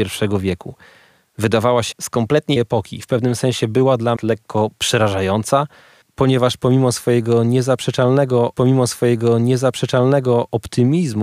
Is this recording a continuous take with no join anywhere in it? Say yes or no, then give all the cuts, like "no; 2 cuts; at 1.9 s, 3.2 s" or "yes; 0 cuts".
no; 4 cuts; at 1.9 s, 2.6 s, 4.2 s, 8.5 s